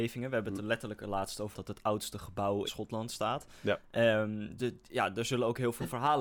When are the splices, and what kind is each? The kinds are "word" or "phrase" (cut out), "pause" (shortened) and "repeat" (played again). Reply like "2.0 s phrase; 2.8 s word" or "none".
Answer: 1.5 s word; 2.7 s word; 4.6 s word

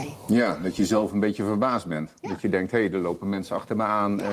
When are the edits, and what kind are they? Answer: none

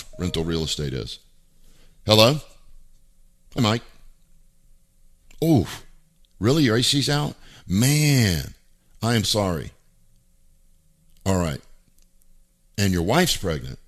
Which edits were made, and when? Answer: 3.6 s word; 9.2 s word

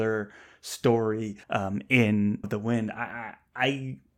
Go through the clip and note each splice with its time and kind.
1.4 s pause; 2.4 s word

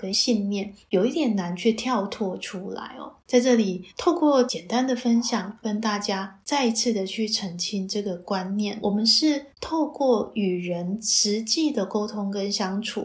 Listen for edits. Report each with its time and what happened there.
9.5 s pause

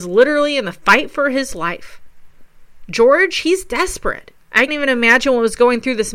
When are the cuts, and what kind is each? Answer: 4.7 s word

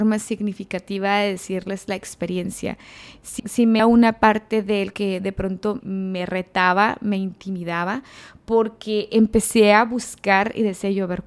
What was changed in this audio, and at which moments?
3.4 s word; 3.8 s word; 4.9 s word; 5.8 s word

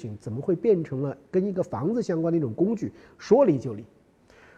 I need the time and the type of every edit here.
none

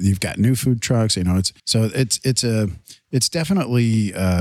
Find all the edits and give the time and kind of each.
1.6 s pause

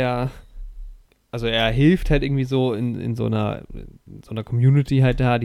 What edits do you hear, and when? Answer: none

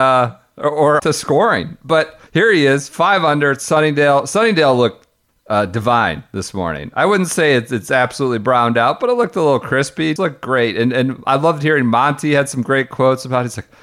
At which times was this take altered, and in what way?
1.0 s word; 2.3 s pause; 5.3 s pause; 10.2 s word

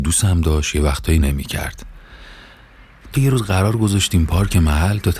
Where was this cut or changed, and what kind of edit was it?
1.2 s word; 3.1 s word

